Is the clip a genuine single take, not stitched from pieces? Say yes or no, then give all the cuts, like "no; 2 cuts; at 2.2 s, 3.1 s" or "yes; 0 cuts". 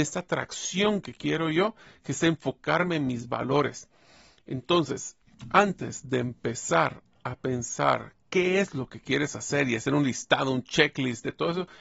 yes; 0 cuts